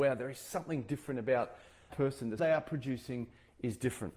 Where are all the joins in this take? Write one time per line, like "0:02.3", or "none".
0:01.9
0:02.4